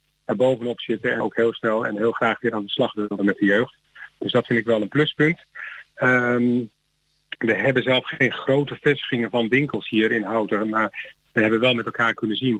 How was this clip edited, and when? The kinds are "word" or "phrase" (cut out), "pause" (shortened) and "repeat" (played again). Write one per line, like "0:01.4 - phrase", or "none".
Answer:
0:01.2 - word